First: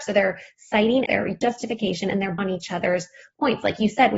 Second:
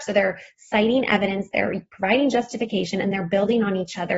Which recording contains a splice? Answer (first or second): first